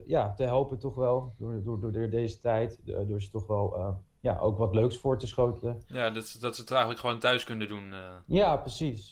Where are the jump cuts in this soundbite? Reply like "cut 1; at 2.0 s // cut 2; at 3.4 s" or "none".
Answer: none